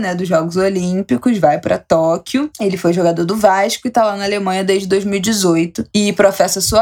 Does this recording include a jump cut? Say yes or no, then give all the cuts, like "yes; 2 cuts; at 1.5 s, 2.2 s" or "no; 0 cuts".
no; 0 cuts